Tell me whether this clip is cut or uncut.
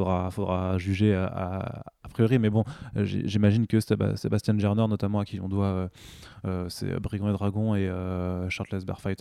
uncut